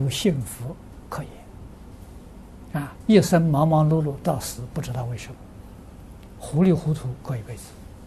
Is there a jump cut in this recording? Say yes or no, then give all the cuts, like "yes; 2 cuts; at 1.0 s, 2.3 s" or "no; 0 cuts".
no; 0 cuts